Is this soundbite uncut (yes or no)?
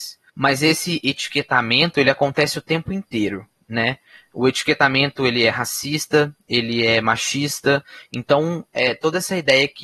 yes